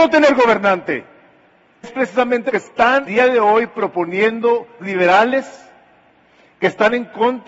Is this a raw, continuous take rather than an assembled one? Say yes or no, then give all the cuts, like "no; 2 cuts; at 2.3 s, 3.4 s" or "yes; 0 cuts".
no; 4 cuts; at 1.8 s, 2.5 s, 3.0 s, 4.8 s